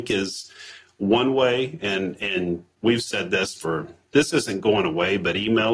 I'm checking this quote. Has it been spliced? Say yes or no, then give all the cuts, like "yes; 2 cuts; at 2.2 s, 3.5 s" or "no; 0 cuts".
no; 0 cuts